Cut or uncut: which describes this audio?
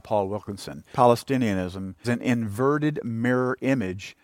cut